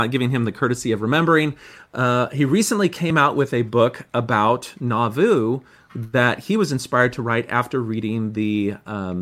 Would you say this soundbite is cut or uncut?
uncut